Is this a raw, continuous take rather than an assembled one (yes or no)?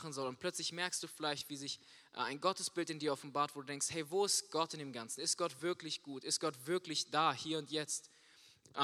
yes